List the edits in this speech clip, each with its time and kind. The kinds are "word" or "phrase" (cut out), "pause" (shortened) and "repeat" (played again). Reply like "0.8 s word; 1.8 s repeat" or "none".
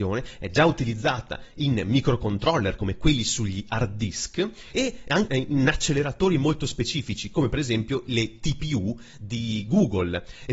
5.3 s word